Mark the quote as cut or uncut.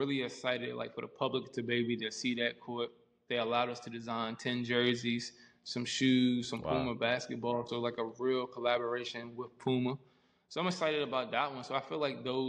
uncut